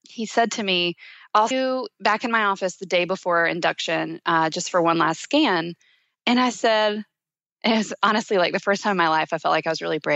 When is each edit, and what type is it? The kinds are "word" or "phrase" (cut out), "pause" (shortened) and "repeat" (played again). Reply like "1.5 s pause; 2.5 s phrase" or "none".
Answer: 1.5 s word

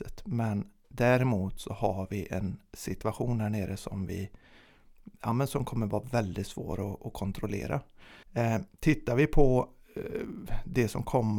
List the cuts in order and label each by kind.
8.2 s pause

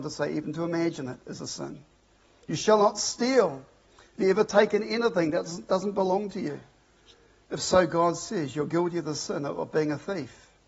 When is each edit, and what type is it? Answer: none

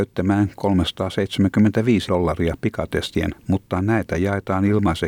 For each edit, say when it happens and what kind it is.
2.1 s word; 3.3 s word

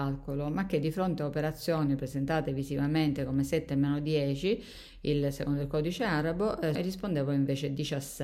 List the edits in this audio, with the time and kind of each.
6.7 s word

